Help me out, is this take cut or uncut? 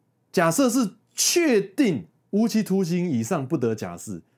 uncut